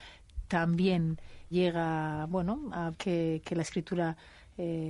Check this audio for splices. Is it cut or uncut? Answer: cut